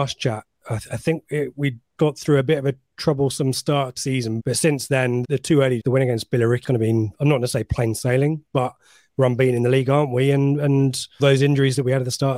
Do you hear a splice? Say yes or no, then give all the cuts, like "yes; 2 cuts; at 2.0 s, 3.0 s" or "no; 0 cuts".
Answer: yes; 7 cuts; at 2.0 s, 4.0 s, 4.4 s, 5.2 s, 5.8 s, 6.6 s, 11.2 s